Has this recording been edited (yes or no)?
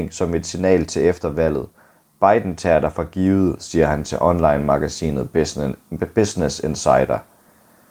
no